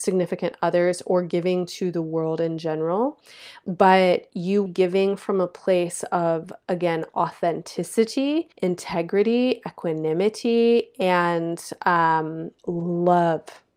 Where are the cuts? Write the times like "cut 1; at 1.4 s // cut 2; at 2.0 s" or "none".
cut 1; at 4.7 s // cut 2; at 8.5 s // cut 3; at 12.6 s